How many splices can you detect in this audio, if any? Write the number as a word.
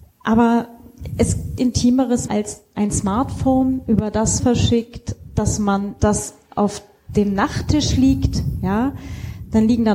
four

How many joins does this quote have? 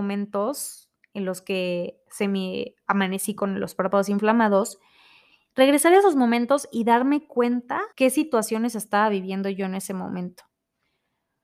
one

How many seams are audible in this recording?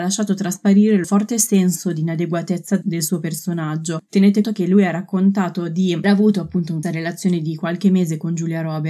four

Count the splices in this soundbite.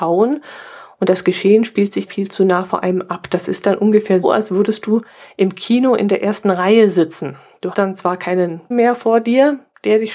four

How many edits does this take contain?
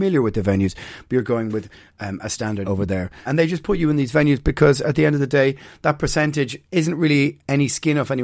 two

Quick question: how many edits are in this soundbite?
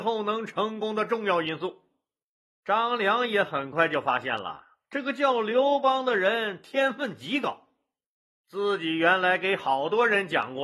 zero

